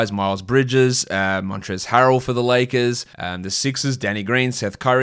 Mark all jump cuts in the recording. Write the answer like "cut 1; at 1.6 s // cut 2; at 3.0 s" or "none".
cut 1; at 3.1 s

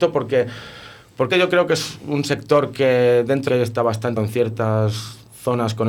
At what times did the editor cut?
cut 1; at 1.3 s // cut 2; at 3.5 s // cut 3; at 4.2 s

